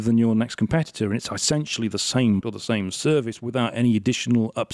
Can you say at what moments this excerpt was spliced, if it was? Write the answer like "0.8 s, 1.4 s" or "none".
2.4 s